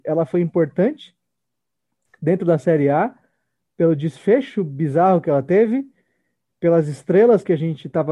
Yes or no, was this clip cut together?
no